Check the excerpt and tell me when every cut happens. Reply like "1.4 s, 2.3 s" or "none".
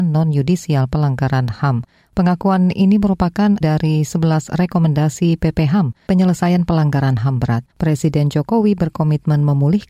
3.6 s, 6.1 s, 7.7 s